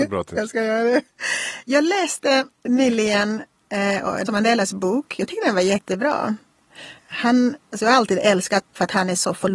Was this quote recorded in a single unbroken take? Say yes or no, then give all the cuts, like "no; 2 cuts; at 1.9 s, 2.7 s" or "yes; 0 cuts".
no; 4 cuts; at 2.5 s, 4.3 s, 7.0 s, 8.6 s